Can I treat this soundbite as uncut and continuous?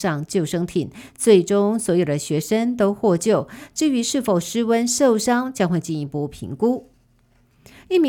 yes; 0 cuts

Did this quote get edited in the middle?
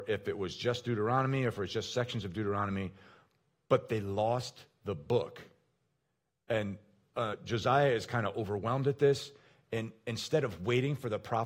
no; 0 cuts

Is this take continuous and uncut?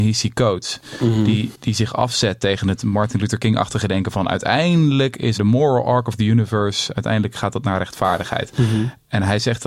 no; 1 cut; at 5.3 s

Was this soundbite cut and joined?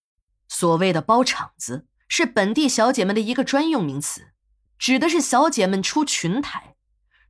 no; 0 cuts

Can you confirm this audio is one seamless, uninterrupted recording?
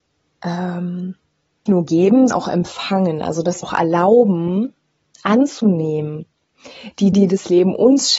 no; 4 cuts; at 1.7 s, 2.3 s, 3.6 s, 7.1 s

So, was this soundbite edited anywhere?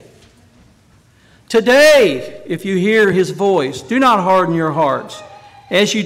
no; 0 cuts

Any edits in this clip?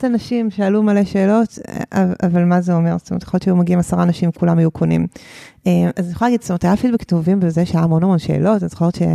no; 0 cuts

